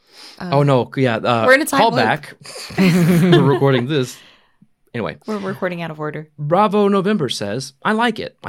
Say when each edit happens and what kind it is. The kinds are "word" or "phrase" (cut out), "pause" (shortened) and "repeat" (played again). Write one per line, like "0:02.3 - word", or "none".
none